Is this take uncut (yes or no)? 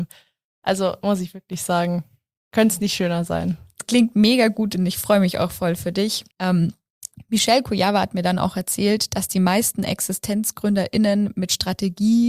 no